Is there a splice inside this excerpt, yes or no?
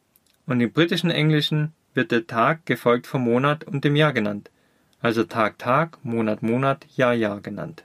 no